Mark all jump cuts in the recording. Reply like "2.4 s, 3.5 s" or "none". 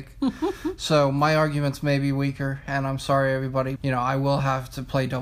3.8 s